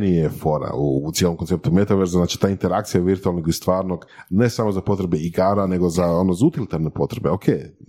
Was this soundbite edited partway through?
no; 0 cuts

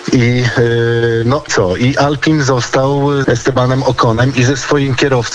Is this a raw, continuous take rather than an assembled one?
no; 2 cuts; at 1.5 s, 3.2 s

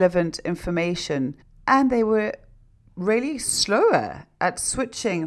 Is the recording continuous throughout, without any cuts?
no; 1 cut; at 1.4 s

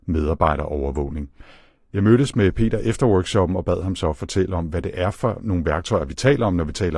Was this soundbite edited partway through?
no; 0 cuts

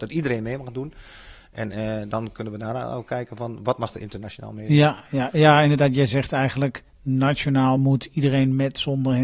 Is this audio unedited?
yes; 0 cuts

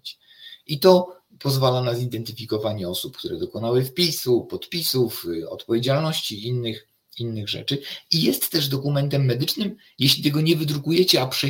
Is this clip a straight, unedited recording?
yes; 0 cuts

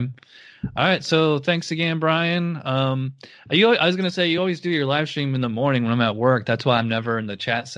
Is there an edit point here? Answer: no; 0 cuts

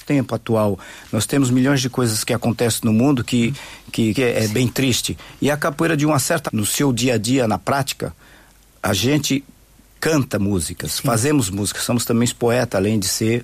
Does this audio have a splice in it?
yes; 2 cuts; at 4.2 s, 6.5 s

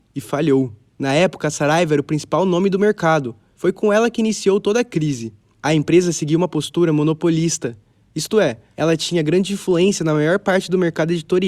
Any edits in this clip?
no; 0 cuts

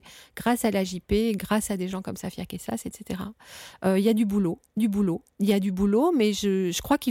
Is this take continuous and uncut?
no; 1 cut; at 4.8 s

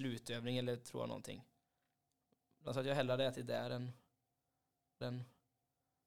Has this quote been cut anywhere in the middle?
yes; 2 cuts; at 2.7 s, 5.0 s

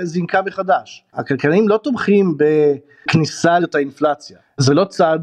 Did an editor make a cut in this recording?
yes; 2 cuts; at 1.1 s, 3.6 s

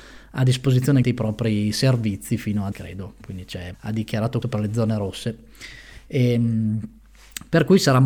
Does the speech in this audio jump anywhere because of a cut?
yes; 4 cuts; at 1.0 s, 2.7 s, 3.7 s, 4.4 s

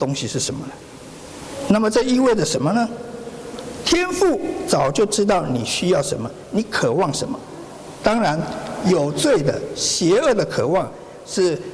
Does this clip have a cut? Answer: no; 0 cuts

